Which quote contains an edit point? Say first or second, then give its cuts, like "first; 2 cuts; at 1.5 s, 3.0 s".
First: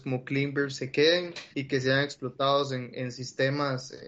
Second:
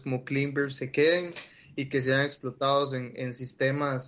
first; 1 cut; at 1.5 s